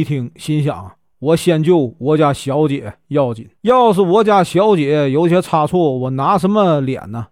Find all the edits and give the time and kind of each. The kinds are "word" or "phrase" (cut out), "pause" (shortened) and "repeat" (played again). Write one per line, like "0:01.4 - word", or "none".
0:03.5 - pause